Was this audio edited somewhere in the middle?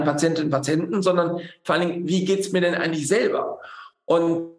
no; 0 cuts

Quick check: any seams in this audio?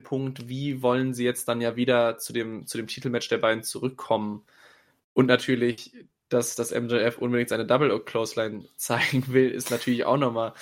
no; 0 cuts

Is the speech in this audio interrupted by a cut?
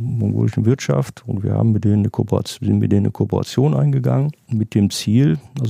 no; 0 cuts

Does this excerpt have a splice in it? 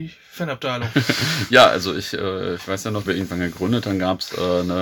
yes; 1 cut; at 3.1 s

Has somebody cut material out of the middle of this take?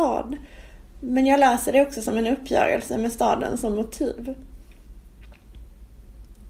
no; 0 cuts

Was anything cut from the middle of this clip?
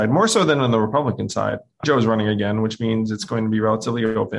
yes; 1 cut; at 1.8 s

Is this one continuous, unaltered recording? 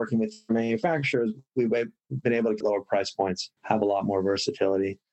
no; 2 cuts; at 2.6 s, 3.6 s

